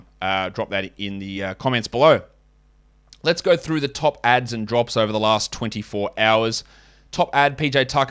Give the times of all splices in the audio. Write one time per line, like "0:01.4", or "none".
none